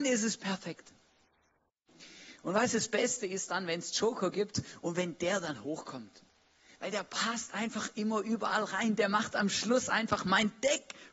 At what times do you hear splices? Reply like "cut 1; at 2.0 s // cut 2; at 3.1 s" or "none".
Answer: none

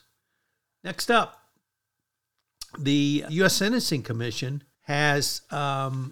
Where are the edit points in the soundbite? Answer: cut 1; at 3.3 s // cut 2; at 4.7 s

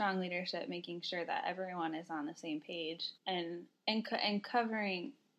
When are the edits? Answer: cut 1; at 3.2 s

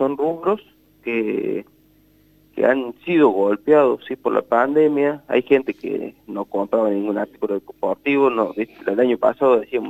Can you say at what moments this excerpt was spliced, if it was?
none

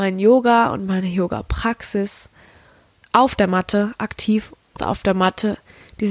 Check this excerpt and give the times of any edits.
cut 1; at 4.8 s

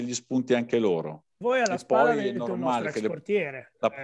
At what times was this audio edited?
cut 1; at 1.3 s

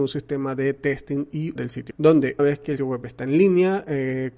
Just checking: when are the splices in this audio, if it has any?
cut 1; at 1.6 s // cut 2; at 1.9 s // cut 3; at 2.4 s // cut 4; at 2.8 s

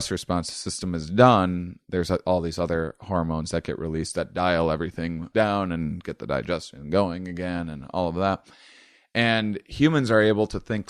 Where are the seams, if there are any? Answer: cut 1; at 5.3 s

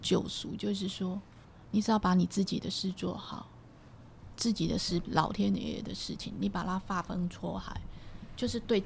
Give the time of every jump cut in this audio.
cut 1; at 1.4 s // cut 2; at 4.3 s // cut 3; at 5.0 s

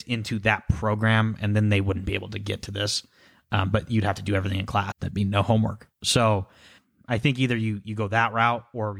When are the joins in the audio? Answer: cut 1; at 4.9 s

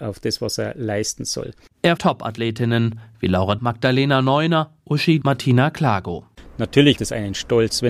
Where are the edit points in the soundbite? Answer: cut 1; at 2.0 s // cut 2; at 3.6 s // cut 3; at 5.2 s // cut 4; at 7.0 s

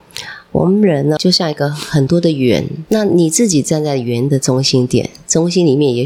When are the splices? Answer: cut 1; at 1.2 s // cut 2; at 2.9 s

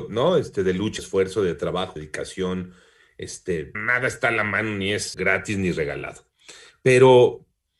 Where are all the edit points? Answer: cut 1; at 1.0 s // cut 2; at 2.0 s // cut 3; at 3.7 s // cut 4; at 5.1 s

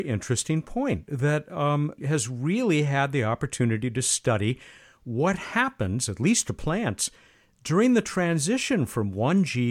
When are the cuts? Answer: cut 1; at 2.0 s

